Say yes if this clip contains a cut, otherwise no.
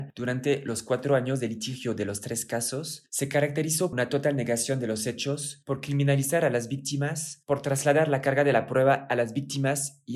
yes